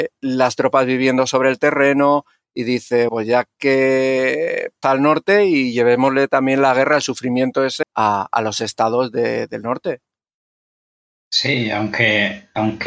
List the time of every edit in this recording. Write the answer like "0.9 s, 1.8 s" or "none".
3.1 s, 4.8 s, 7.8 s

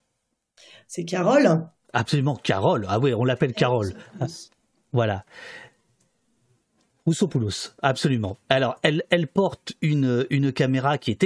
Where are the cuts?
none

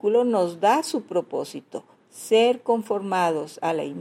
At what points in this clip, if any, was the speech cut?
none

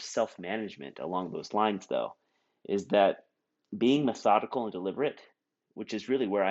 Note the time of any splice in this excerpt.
none

